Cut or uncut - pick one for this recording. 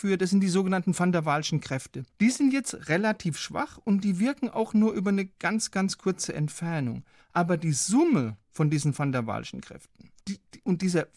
cut